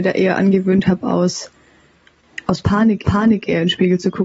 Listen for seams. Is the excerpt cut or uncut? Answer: cut